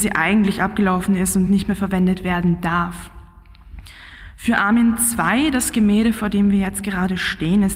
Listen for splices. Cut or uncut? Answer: uncut